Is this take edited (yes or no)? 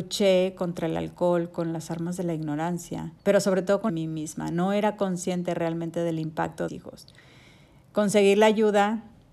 yes